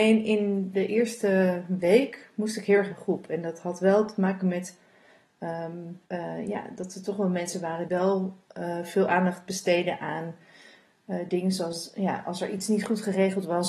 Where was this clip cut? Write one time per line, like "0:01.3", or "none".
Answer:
0:02.9
0:06.1
0:07.9